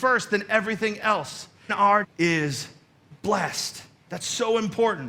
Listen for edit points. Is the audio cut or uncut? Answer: cut